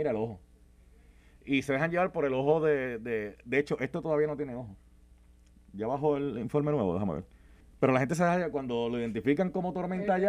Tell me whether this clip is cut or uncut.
cut